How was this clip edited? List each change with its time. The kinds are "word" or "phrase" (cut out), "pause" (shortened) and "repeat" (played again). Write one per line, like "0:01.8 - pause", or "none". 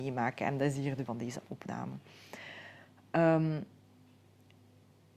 0:01.1 - word